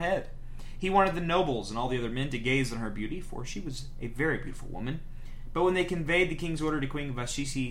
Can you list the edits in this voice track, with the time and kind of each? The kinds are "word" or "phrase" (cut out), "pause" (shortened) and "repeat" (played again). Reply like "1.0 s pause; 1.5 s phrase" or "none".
none